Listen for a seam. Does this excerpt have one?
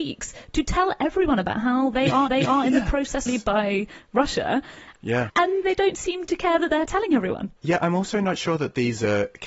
yes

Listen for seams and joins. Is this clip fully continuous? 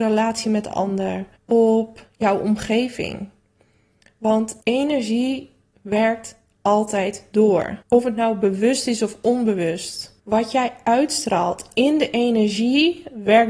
no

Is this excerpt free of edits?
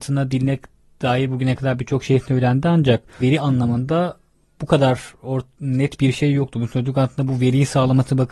no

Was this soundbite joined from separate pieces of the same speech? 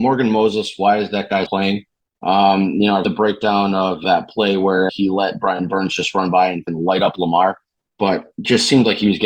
yes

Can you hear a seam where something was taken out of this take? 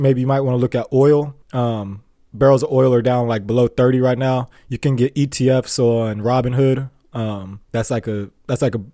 yes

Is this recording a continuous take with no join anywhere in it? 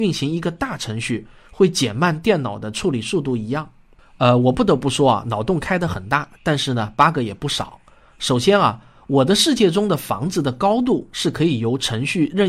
yes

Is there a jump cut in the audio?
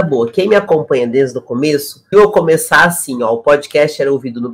yes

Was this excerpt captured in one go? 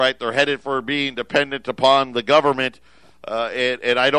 yes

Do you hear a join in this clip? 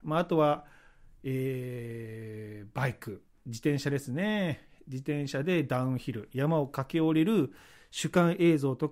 no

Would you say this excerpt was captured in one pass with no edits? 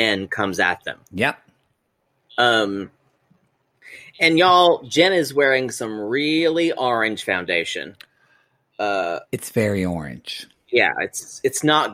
yes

